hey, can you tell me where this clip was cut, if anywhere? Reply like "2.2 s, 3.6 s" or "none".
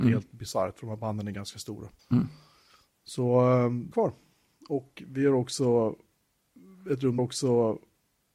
2.0 s, 3.9 s, 7.2 s